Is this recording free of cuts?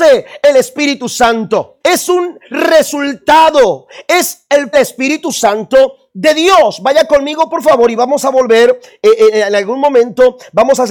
no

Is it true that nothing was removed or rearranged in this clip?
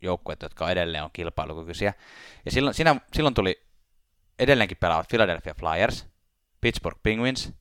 yes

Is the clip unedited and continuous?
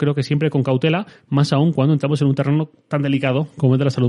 yes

